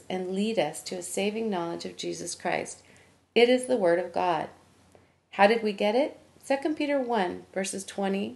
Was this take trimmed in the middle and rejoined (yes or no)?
no